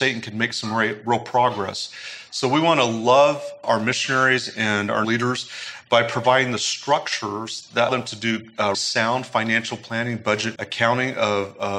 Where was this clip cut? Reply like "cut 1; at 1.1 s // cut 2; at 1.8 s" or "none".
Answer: cut 1; at 3.6 s // cut 2; at 5.0 s // cut 3; at 7.9 s // cut 4; at 8.7 s // cut 5; at 10.6 s